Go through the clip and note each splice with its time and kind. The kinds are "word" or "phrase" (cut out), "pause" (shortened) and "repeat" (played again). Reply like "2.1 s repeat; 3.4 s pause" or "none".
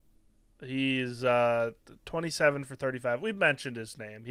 none

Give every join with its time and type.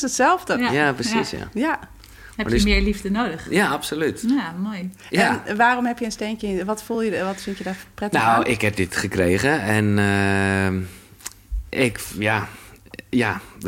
none

